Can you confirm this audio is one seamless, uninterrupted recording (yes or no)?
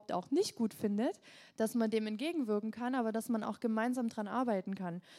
yes